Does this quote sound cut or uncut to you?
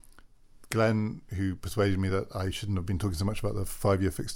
uncut